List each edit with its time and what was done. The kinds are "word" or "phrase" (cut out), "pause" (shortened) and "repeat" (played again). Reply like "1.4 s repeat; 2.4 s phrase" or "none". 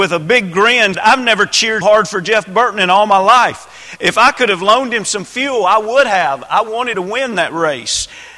0.9 s word; 1.8 s word; 6.9 s word